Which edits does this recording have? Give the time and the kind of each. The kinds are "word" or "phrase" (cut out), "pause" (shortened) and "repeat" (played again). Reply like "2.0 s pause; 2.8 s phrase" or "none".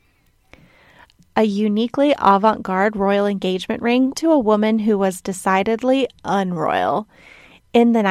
4.1 s word